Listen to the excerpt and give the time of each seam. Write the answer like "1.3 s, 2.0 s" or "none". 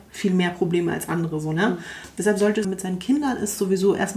2.6 s